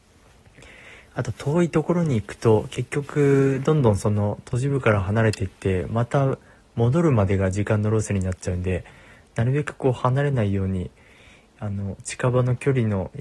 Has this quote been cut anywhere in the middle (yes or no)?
no